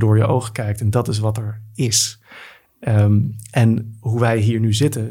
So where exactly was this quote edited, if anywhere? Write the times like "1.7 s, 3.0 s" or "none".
none